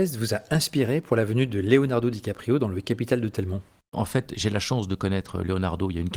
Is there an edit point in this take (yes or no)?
no